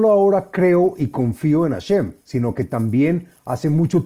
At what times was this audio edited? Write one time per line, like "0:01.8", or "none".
0:02.2